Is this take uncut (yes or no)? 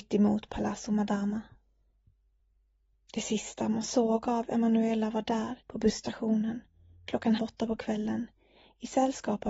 no